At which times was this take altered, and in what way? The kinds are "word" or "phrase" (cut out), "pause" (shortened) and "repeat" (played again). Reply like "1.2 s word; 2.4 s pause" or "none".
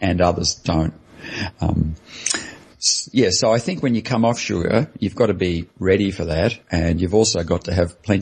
5.7 s pause; 6.6 s pause

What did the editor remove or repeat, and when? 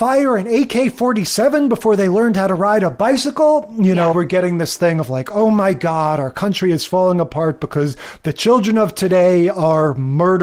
4.1 s word

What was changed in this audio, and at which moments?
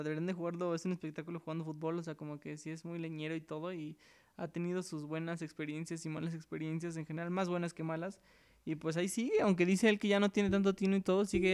none

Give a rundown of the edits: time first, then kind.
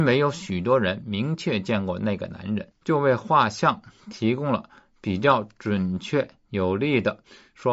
none

